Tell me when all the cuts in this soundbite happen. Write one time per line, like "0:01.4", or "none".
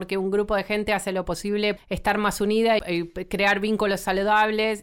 0:01.8
0:02.8